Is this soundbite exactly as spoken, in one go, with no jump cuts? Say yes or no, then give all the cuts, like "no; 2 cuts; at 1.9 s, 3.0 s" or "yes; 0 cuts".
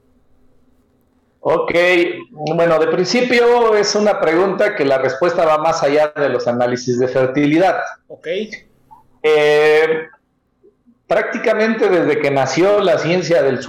yes; 0 cuts